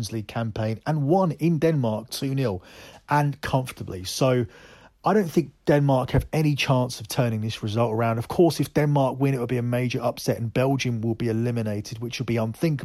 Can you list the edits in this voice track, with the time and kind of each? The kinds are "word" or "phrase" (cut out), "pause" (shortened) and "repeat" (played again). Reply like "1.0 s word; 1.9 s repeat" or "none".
none